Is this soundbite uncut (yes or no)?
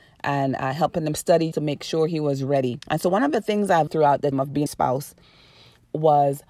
no